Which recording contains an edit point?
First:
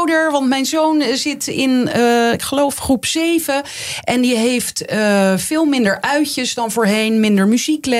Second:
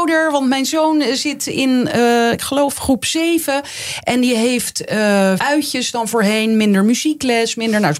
second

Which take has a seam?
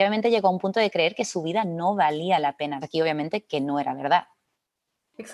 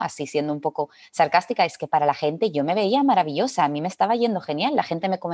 first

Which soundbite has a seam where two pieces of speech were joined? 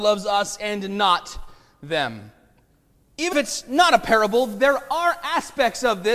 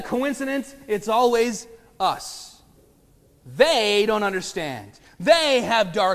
first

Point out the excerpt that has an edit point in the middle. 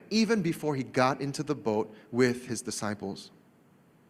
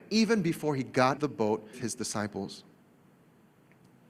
second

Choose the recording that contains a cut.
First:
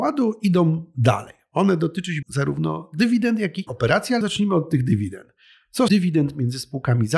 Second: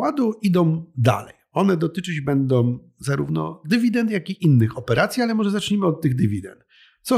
first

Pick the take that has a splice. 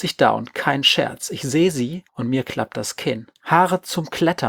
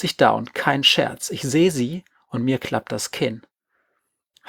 first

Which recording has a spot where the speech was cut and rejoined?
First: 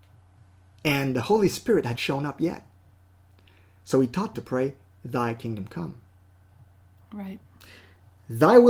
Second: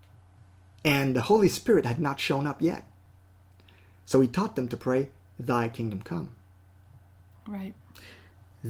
first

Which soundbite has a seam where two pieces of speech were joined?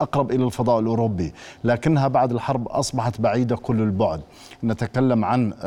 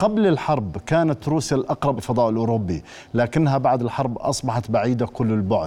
second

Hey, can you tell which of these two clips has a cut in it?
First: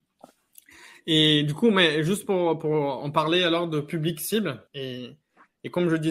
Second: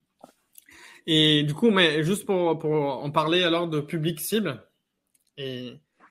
first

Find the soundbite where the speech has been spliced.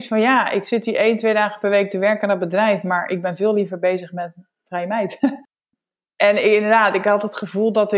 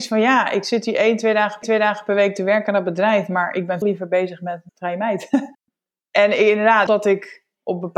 second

